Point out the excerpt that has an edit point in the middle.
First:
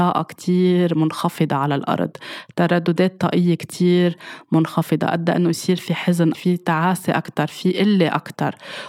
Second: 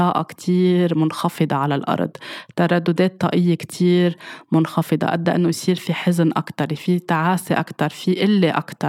first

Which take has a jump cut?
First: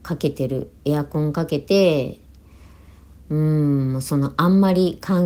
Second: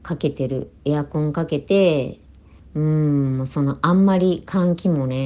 second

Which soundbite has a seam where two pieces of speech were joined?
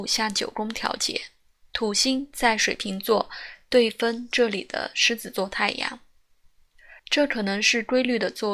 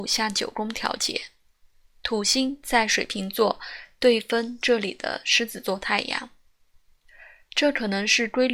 first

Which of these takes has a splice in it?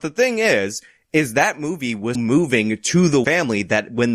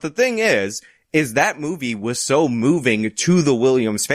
first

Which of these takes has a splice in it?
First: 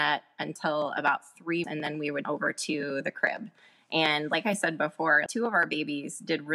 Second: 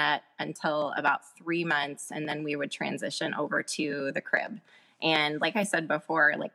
first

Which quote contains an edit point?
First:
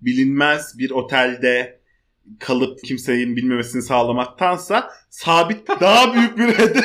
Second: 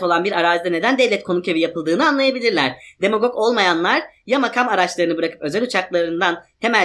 first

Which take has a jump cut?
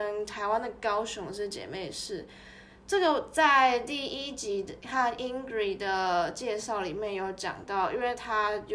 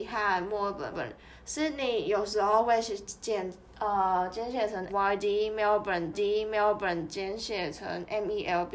second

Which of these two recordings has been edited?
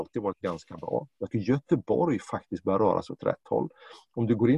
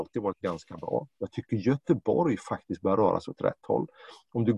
first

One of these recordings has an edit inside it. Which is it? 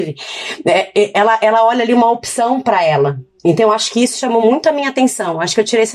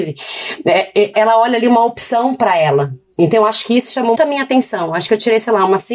second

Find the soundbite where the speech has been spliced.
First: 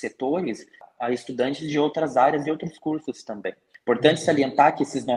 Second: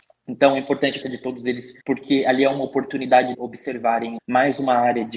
second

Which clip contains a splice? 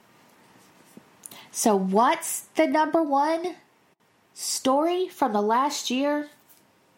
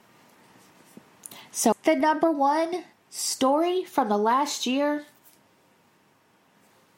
second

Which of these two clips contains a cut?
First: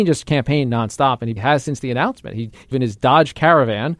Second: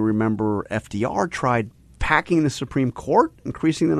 first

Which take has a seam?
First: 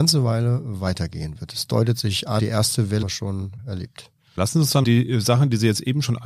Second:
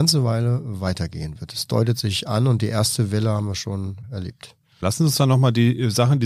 first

